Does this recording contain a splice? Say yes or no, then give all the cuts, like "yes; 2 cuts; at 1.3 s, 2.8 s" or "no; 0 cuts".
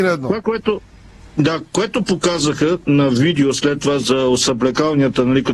no; 0 cuts